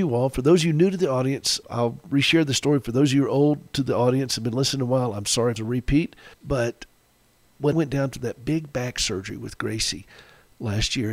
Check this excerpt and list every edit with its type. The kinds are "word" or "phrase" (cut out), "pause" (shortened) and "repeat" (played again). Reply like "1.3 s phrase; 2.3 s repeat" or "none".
1.6 s word; 5.6 s phrase; 6.3 s pause; 7.7 s word